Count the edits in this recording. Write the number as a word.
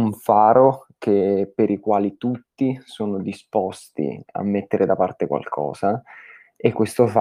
zero